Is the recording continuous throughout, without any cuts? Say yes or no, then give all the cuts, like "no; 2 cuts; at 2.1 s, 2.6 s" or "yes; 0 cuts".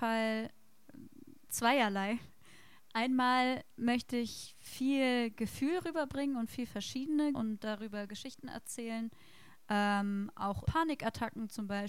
no; 3 cuts; at 1.5 s, 7.3 s, 10.7 s